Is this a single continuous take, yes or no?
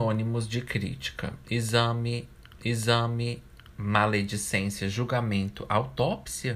no